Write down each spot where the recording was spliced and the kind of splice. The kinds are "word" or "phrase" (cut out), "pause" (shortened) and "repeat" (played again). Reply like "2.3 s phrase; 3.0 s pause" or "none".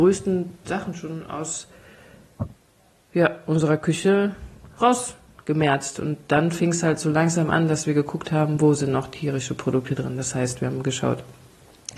none